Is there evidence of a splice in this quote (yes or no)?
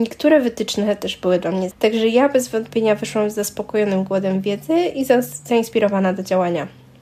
yes